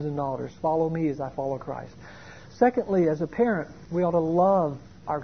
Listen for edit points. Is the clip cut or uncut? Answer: uncut